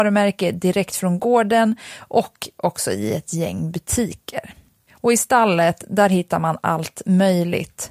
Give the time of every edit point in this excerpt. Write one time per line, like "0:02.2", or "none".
none